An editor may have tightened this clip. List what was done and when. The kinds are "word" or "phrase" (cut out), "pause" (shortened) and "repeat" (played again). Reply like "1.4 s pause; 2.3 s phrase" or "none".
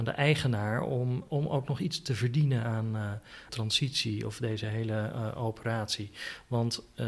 1.3 s word; 3.5 s phrase